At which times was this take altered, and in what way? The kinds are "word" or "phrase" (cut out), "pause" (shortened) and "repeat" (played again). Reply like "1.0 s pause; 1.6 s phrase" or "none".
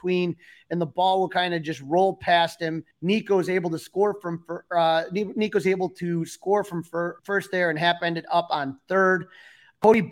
2.9 s pause; 7.2 s pause